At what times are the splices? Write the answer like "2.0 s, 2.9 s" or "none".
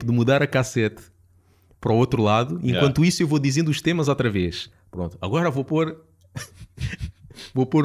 none

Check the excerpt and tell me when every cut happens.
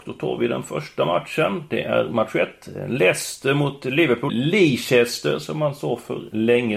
4.3 s

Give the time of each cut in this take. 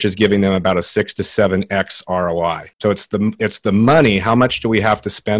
2.7 s

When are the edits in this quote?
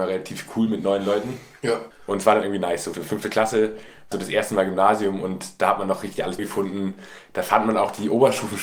2.9 s, 4.1 s, 6.4 s

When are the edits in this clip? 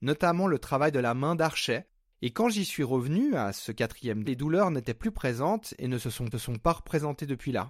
2.1 s, 4.3 s, 6.3 s

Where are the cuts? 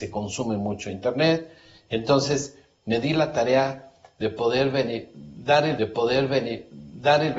5.8 s

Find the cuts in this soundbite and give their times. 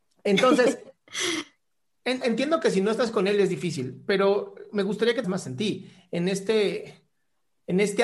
2.2 s, 5.2 s

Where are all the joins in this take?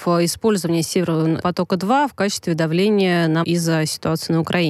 1.4 s, 3.4 s

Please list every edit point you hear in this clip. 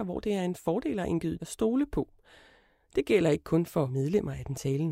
1.4 s, 3.9 s

